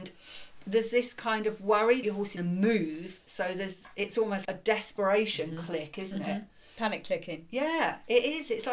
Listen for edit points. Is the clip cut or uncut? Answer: cut